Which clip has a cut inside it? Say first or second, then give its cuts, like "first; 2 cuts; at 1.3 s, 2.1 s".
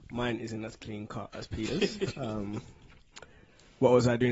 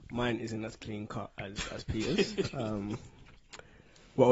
first; 1 cut; at 1.3 s